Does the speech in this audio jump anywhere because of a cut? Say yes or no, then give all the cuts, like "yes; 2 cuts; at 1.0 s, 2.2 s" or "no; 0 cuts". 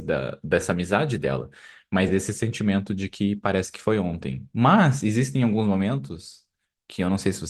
no; 0 cuts